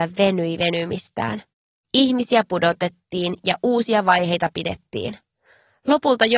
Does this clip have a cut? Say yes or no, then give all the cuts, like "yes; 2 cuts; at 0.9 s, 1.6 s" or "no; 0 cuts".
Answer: no; 0 cuts